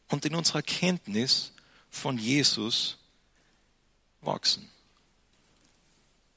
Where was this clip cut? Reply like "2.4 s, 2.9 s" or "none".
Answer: none